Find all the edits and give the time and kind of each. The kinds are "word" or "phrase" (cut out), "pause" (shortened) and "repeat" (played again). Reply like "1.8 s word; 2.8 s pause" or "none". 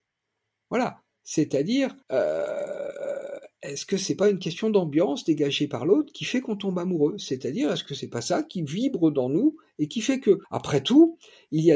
2.0 s pause; 10.4 s pause